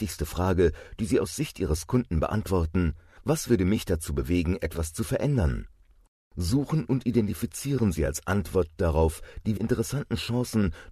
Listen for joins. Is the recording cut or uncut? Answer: cut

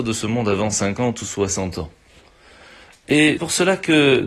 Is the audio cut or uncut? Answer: cut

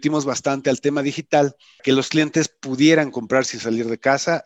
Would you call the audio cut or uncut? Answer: cut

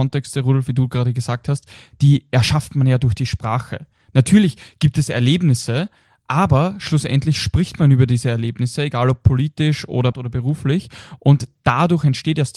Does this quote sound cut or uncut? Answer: cut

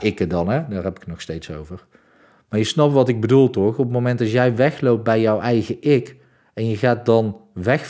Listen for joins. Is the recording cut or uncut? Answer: uncut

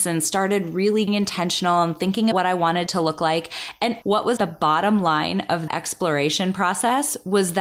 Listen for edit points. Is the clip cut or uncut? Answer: cut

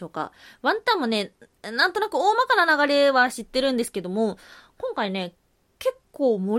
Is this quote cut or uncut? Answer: uncut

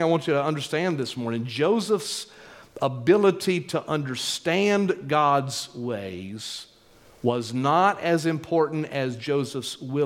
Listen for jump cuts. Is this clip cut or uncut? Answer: uncut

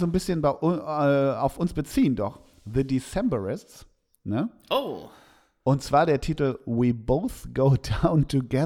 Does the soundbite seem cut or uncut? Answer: uncut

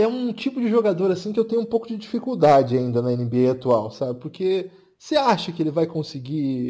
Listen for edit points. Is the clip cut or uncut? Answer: uncut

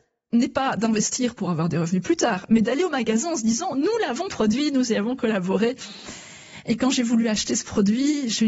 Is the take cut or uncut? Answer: uncut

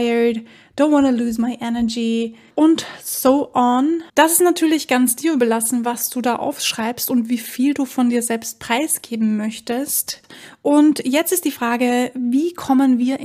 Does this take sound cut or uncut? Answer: cut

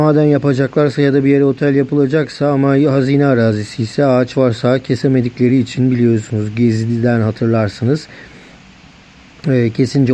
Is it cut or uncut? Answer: uncut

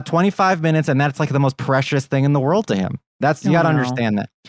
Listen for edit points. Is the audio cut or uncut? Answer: cut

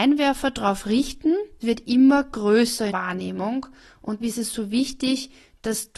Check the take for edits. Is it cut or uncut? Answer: cut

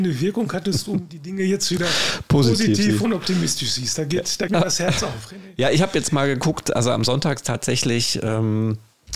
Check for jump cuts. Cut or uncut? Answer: cut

